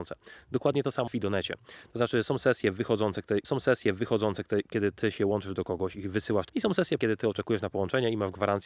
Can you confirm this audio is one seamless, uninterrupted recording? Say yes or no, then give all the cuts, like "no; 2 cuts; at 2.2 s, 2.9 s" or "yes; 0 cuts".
no; 4 cuts; at 1.1 s, 3.4 s, 6.5 s, 7.0 s